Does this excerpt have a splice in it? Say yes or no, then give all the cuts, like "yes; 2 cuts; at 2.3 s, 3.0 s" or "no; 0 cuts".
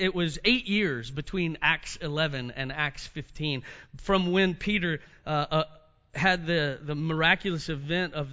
no; 0 cuts